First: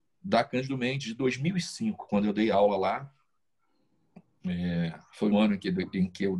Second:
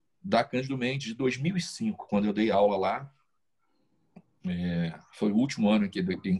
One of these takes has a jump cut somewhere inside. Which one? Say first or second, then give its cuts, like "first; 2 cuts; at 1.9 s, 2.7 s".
first; 1 cut; at 5.3 s